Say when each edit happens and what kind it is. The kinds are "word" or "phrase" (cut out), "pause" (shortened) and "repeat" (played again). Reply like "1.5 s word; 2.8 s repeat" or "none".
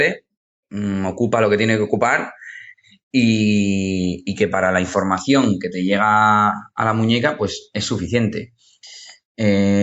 none